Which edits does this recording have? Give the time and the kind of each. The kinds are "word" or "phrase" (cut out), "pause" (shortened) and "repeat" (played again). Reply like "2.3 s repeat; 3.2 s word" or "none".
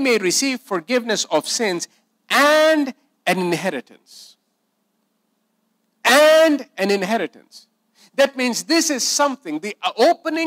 none